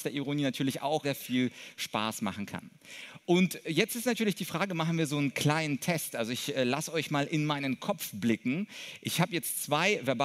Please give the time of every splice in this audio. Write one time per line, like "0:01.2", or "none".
0:01.0